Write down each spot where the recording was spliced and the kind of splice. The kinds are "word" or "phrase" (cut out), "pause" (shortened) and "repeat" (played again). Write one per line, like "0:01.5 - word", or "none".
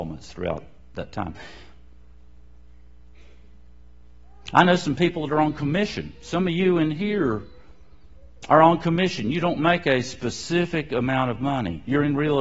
none